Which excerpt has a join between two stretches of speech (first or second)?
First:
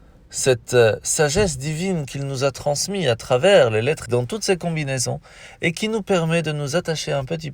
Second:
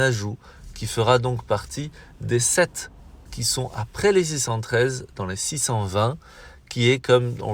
first